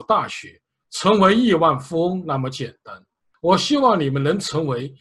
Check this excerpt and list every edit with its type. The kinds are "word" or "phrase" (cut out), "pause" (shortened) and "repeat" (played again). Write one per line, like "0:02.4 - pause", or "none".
none